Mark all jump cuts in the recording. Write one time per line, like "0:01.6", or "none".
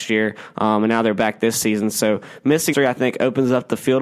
0:02.7